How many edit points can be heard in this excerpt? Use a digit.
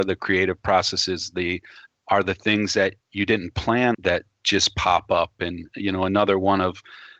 3